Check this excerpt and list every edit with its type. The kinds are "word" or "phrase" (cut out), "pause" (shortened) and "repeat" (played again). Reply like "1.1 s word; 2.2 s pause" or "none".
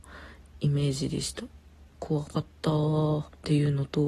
none